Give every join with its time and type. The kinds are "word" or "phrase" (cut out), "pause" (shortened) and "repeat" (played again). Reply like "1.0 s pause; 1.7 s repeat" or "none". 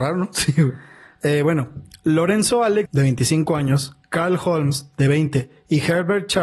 2.9 s word

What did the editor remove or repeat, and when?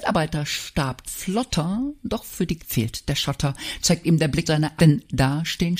1.1 s word; 2.6 s word; 4.5 s word; 4.8 s word

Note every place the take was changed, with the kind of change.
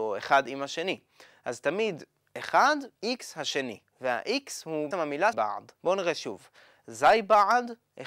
3.0 s pause; 4.9 s word; 5.3 s word; 5.7 s pause

